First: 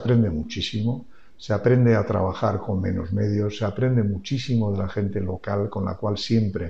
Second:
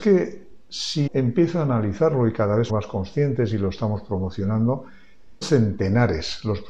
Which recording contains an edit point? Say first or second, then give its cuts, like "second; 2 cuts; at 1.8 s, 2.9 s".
second; 3 cuts; at 1.1 s, 2.7 s, 5.4 s